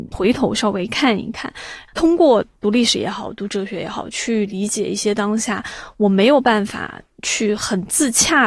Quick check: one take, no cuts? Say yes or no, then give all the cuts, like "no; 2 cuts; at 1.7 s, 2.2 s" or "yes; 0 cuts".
yes; 0 cuts